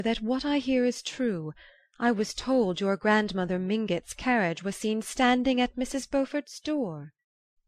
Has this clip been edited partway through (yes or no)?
no